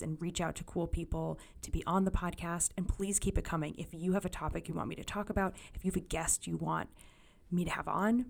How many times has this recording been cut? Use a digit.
0